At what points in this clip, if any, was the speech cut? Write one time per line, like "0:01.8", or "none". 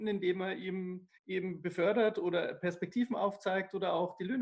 0:01.2